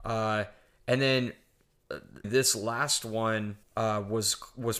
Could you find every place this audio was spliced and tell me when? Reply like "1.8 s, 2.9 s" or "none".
2.2 s, 3.6 s